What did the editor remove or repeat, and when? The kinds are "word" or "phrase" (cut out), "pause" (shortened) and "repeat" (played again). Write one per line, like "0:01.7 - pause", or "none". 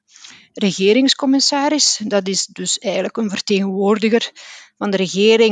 none